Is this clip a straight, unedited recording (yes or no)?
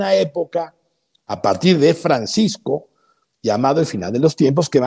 yes